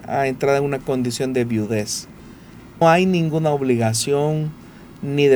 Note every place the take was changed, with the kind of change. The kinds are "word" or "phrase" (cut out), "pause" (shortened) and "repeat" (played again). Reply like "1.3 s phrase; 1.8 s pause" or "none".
2.8 s phrase